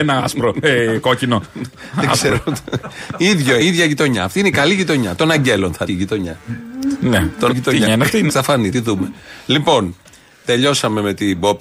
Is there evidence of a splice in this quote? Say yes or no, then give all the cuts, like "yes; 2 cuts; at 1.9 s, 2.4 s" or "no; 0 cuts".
yes; 6 cuts; at 3.6 s, 5.9 s, 7.5 s, 7.9 s, 8.3 s, 8.7 s